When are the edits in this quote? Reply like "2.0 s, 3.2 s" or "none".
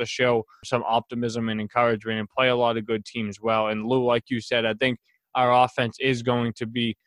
none